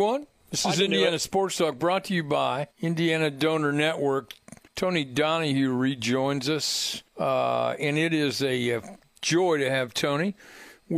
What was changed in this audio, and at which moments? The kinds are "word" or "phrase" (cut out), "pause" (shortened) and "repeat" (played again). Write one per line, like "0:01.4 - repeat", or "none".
0:02.7 - pause
0:04.7 - pause
0:07.1 - pause